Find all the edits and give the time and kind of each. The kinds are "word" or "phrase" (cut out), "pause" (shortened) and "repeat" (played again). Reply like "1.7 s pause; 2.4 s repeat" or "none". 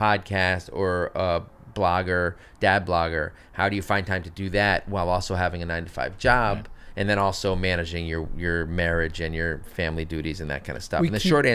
none